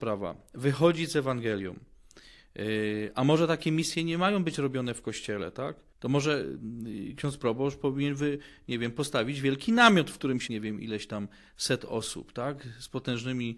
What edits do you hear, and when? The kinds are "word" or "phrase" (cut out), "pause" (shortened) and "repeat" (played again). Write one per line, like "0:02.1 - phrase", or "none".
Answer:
0:05.9 - pause
0:10.5 - phrase

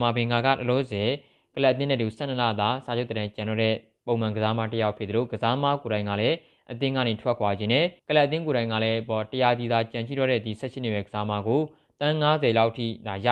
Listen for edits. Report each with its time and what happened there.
0:08.0 - pause

